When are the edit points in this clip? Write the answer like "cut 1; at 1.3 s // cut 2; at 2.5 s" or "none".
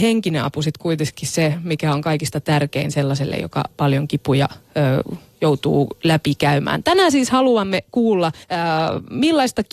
cut 1; at 4.6 s // cut 2; at 8.4 s